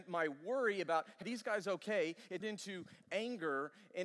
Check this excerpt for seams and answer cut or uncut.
cut